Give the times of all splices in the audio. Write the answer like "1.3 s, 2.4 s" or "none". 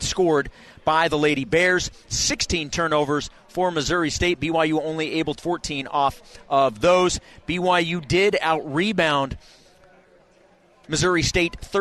5.4 s